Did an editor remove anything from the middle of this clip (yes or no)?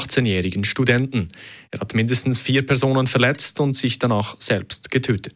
no